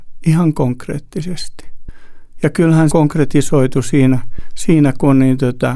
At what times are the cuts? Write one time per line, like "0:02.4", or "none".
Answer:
0:02.9